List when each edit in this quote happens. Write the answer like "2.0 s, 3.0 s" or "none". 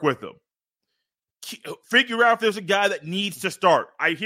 none